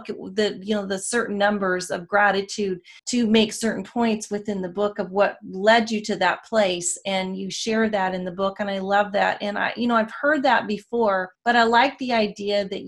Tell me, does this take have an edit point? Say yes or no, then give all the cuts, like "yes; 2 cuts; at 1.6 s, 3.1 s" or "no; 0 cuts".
yes; 2 cuts; at 3.0 s, 11.3 s